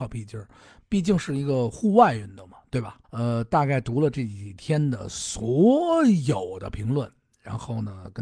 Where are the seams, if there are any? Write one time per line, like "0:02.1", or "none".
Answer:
0:03.0